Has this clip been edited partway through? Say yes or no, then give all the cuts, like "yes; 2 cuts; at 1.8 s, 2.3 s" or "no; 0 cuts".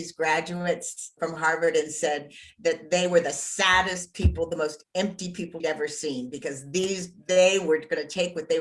yes; 2 cuts; at 1.2 s, 5.6 s